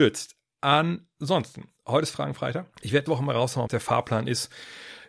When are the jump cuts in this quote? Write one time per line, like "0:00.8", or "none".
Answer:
0:01.8
0:02.7
0:03.1
0:03.7